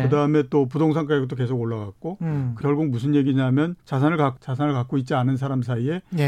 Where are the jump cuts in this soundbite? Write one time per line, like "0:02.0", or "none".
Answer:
0:02.6
0:03.8
0:04.4